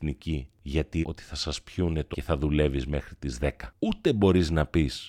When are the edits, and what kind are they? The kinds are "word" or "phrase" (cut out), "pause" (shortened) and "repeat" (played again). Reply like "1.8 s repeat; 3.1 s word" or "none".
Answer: 1.0 s word; 2.1 s word